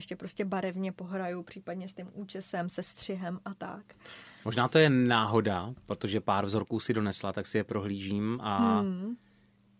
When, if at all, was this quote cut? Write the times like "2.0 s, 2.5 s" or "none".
none